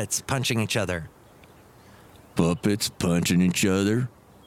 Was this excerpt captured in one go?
yes; 0 cuts

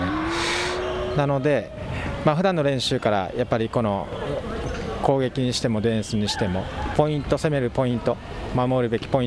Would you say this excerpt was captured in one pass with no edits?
no; 1 cut; at 6.9 s

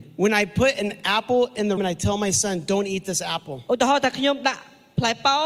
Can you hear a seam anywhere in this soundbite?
yes; 1 cut; at 1.8 s

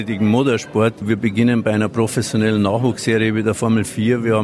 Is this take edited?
no; 0 cuts

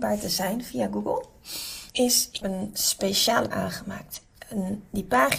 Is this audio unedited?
no; 3 cuts; at 1.9 s, 2.4 s, 3.5 s

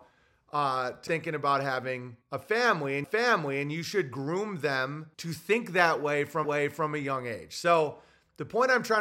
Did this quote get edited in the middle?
yes; 5 cuts; at 1.1 s, 2.2 s, 3.0 s, 5.1 s, 6.4 s

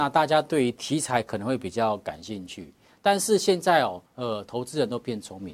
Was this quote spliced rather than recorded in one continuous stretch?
yes; 1 cut; at 4.1 s

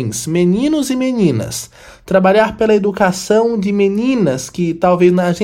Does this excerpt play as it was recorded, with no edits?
yes; 0 cuts

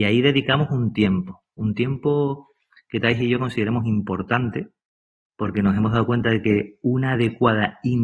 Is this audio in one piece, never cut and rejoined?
yes; 0 cuts

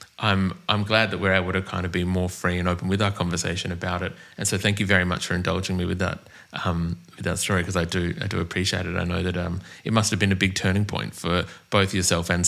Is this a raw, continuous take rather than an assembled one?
yes; 0 cuts

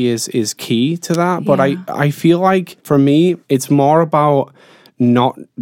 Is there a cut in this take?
yes; 2 cuts; at 2.8 s, 3.4 s

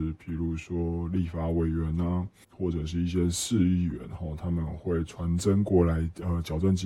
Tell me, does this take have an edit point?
yes; 1 cut; at 2.4 s

